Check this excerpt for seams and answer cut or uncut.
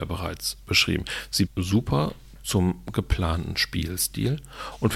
cut